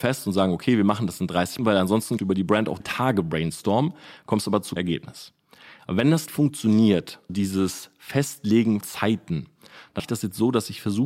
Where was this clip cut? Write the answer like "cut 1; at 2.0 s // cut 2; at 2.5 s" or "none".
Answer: cut 1; at 1.6 s // cut 2; at 2.2 s // cut 3; at 2.8 s // cut 4; at 4.8 s // cut 5; at 6.3 s // cut 6; at 7.3 s // cut 7; at 8.8 s // cut 8; at 10.0 s